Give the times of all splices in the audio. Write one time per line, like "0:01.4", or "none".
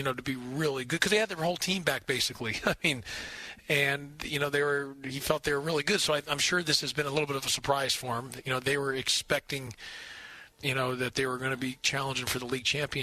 0:10.5